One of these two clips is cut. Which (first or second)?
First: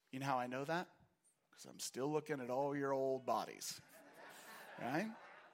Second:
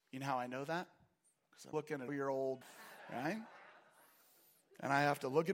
second